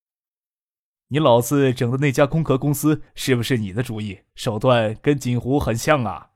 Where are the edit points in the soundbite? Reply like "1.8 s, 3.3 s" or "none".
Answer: 3.1 s, 4.3 s